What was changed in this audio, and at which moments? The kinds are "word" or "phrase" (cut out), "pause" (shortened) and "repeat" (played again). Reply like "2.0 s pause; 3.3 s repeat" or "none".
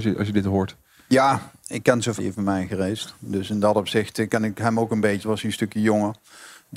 2.2 s word; 5.2 s word